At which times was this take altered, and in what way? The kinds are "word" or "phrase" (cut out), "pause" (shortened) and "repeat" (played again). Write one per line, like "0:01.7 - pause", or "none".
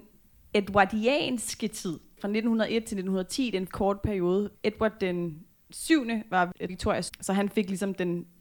0:03.7 - word
0:05.6 - pause
0:06.7 - word
0:07.1 - word